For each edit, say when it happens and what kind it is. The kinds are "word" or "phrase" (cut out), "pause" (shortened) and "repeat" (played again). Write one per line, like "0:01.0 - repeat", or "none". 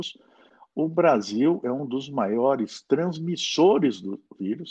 none